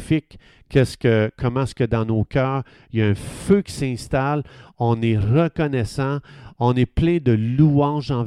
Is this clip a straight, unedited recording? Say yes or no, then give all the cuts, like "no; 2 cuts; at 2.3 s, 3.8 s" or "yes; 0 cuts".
yes; 0 cuts